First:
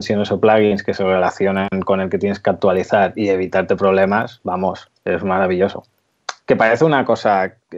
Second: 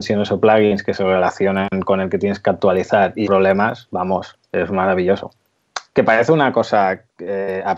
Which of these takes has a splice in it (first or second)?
second